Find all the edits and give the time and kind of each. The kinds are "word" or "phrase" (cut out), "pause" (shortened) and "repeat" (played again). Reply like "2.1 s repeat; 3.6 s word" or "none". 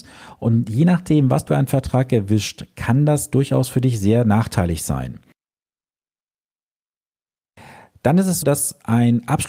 1.5 s word; 8.4 s word